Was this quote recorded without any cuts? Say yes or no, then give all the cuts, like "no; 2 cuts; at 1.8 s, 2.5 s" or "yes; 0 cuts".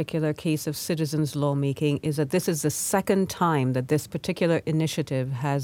yes; 0 cuts